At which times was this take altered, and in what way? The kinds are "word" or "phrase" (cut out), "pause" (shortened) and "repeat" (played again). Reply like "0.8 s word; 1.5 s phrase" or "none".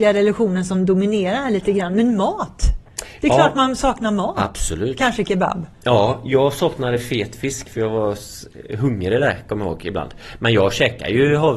5.7 s pause